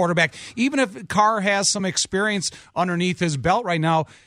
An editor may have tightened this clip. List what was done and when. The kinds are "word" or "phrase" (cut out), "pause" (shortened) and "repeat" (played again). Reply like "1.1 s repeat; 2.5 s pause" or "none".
none

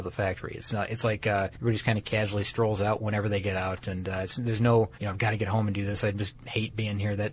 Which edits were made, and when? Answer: 1.5 s pause; 4.9 s pause

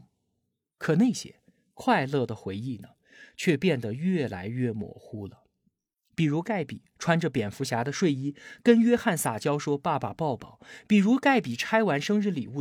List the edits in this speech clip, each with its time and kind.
none

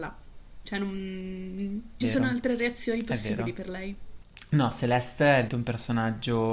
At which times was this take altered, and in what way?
2.0 s phrase; 5.5 s word

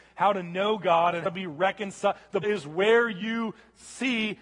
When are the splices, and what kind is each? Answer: 1.3 s word; 2.4 s word

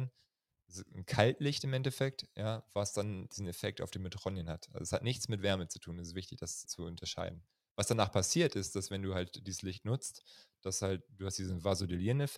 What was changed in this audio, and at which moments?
6.7 s word

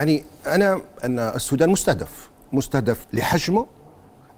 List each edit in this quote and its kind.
1.0 s word; 3.0 s word

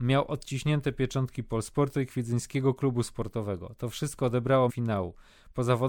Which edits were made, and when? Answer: 4.7 s phrase

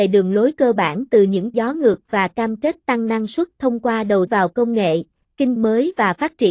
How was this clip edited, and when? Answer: 1.5 s word; 4.3 s word; 5.6 s word

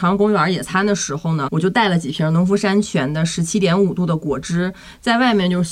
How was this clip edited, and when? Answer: 1.5 s word

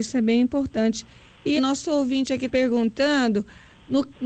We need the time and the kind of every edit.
1.6 s word; 2.5 s word

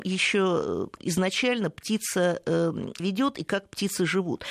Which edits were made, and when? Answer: 1.0 s word; 3.0 s word

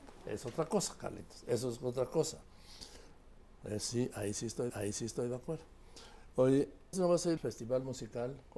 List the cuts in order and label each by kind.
4.7 s repeat; 6.9 s word; 7.4 s word

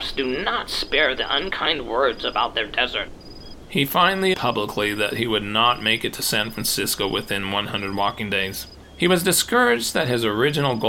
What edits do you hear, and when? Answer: 4.3 s word

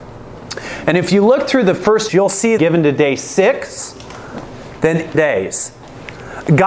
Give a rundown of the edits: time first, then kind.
2.1 s phrase; 2.6 s phrase; 5.1 s phrase

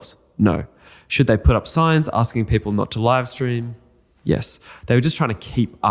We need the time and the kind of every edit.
none

